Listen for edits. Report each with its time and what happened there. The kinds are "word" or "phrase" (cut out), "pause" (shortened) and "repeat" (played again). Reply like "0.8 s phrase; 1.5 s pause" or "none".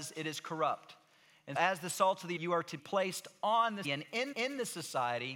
1.6 s word; 2.4 s word; 2.8 s word; 3.8 s word; 4.3 s repeat